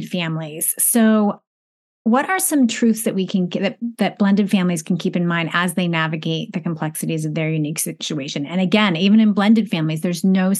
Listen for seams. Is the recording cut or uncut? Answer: uncut